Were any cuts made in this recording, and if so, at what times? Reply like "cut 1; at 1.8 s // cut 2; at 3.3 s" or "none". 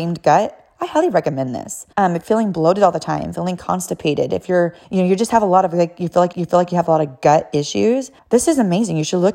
cut 1; at 1.9 s // cut 2; at 2.2 s // cut 3; at 4.8 s // cut 4; at 6.3 s // cut 5; at 8.2 s